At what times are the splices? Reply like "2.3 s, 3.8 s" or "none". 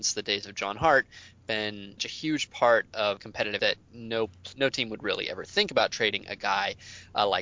2.0 s, 3.2 s, 3.6 s, 4.5 s

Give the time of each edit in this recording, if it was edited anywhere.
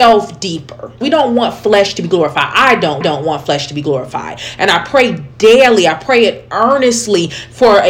1.0 s, 3.0 s

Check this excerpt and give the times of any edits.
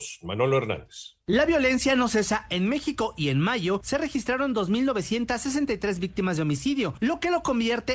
none

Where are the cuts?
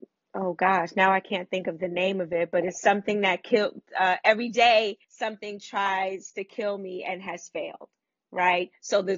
5.0 s

